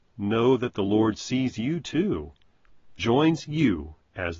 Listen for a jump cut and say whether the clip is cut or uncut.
cut